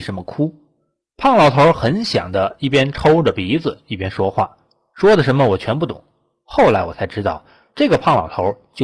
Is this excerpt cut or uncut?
uncut